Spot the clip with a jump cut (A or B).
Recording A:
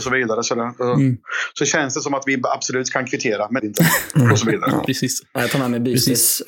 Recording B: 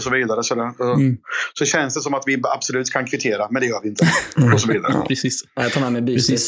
A